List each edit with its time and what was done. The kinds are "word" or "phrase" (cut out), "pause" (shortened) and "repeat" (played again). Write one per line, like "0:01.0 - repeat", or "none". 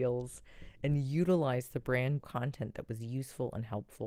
0:02.2 - phrase